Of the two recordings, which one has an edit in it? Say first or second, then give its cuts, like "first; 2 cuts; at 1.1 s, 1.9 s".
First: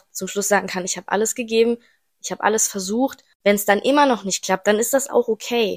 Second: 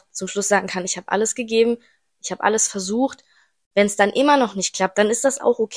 first; 1 cut; at 3.3 s